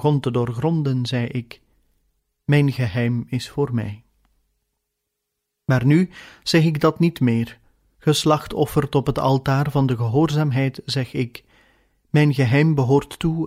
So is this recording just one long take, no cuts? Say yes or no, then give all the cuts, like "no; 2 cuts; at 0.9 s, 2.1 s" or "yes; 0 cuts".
yes; 0 cuts